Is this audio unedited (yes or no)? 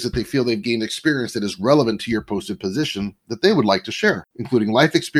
no